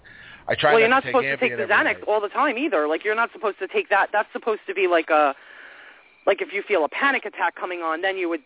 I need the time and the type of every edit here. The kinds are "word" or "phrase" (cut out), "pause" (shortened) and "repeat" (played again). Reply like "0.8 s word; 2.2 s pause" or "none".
none